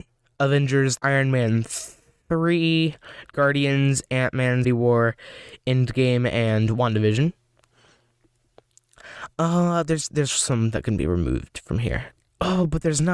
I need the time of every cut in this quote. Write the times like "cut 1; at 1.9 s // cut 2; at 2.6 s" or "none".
cut 1; at 1.0 s // cut 2; at 4.6 s